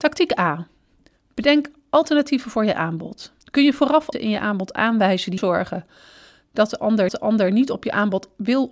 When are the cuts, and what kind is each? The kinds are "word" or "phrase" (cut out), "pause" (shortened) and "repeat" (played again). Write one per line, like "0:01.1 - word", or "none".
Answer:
0:03.4 - pause
0:04.1 - word
0:05.4 - phrase
0:07.1 - repeat